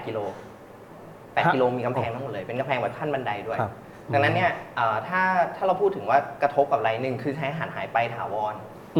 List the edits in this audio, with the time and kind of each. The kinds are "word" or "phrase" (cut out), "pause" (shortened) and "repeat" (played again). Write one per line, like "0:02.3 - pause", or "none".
0:01.2 - pause